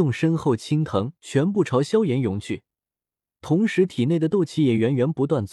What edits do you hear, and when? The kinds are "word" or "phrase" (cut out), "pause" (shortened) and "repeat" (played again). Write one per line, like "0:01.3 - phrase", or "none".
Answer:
0:01.2 - pause